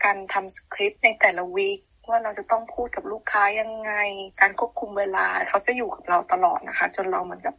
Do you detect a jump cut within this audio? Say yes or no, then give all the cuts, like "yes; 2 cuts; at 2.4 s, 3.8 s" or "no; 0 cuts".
no; 0 cuts